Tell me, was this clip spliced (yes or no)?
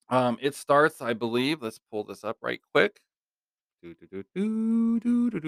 no